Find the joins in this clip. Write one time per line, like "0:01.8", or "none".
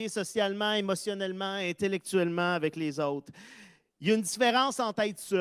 none